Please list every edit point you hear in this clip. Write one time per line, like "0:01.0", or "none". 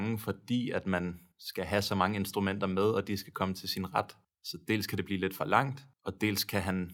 0:01.3
0:04.2
0:05.9